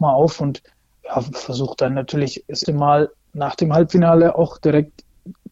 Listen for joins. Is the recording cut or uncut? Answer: cut